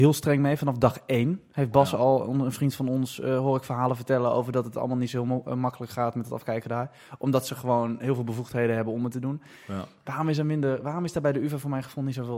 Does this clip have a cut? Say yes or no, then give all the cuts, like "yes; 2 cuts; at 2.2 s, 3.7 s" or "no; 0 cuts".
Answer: no; 0 cuts